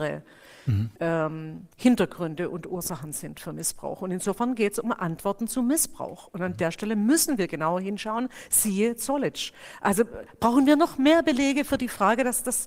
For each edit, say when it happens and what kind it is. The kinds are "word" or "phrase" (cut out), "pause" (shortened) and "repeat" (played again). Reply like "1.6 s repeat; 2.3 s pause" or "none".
1.0 s pause